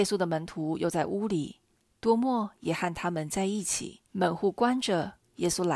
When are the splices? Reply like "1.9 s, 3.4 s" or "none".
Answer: 1.7 s, 4.1 s